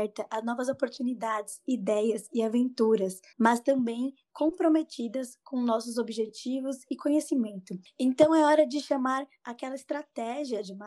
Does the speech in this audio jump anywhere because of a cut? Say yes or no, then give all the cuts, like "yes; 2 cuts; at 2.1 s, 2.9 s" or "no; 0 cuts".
yes; 1 cut; at 3.3 s